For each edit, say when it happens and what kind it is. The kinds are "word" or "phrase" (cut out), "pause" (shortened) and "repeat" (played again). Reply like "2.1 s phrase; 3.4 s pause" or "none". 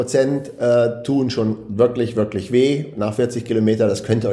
none

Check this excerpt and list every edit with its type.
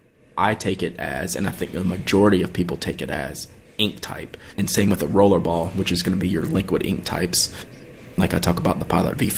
4.5 s pause

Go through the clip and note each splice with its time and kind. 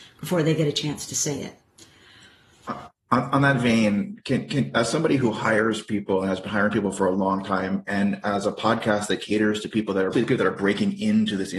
10.1 s phrase

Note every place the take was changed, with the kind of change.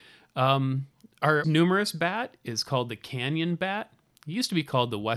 1.4 s phrase

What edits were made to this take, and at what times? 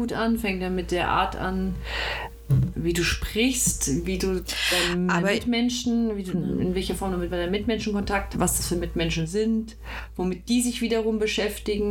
2.7 s word; 6.3 s word; 8.3 s word

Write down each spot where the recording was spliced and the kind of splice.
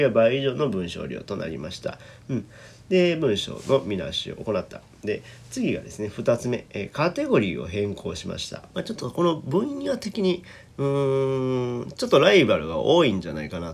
8.7 s phrase

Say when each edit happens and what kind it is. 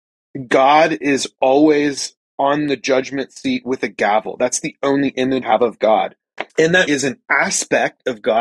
2.2 s pause; 5.4 s word; 6.5 s pause; 6.9 s word

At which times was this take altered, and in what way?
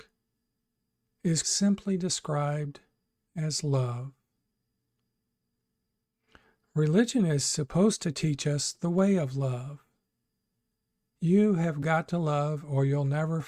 1.4 s word

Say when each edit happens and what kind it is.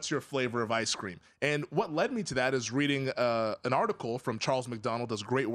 none

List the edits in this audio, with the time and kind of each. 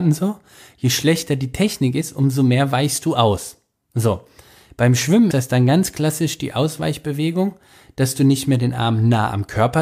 5.3 s word

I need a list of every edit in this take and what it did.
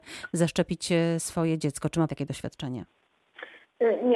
2.1 s word

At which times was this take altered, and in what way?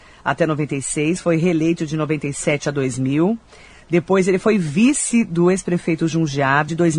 none

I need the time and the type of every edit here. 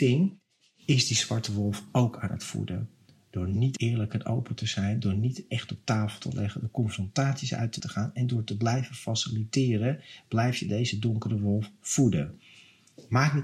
7.8 s word

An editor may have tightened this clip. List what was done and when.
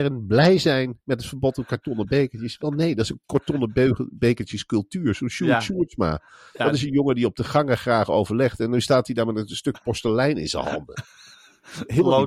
none

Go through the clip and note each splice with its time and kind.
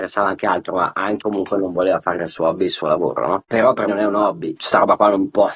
1.2 s word; 2.2 s word; 3.9 s word

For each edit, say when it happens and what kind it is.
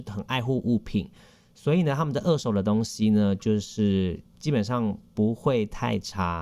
none

